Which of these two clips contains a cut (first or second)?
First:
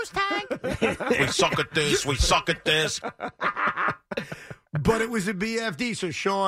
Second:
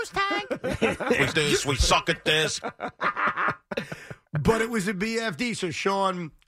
second